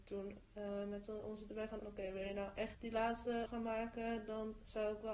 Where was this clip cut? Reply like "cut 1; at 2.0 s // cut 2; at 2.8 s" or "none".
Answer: cut 1; at 1.5 s // cut 2; at 1.8 s // cut 3; at 2.7 s // cut 4; at 3.5 s